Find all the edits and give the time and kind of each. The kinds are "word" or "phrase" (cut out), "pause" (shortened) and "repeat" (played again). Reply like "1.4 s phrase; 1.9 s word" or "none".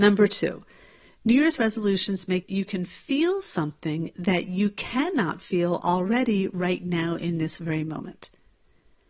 2.4 s phrase